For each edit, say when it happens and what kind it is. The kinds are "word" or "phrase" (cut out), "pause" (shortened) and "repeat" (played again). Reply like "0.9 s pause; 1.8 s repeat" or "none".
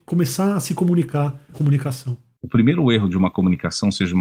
1.5 s phrase